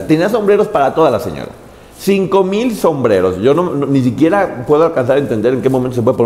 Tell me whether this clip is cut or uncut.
uncut